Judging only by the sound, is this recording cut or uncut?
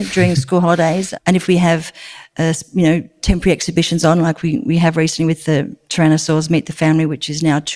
uncut